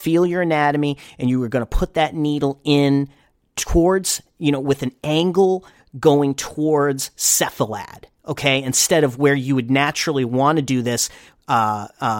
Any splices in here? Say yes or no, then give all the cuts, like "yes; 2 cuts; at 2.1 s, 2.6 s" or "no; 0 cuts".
no; 0 cuts